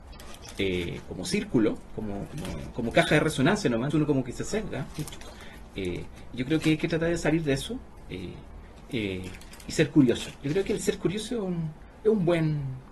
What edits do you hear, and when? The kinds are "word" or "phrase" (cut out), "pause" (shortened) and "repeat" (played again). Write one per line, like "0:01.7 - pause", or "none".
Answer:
0:01.0 - word
0:03.9 - word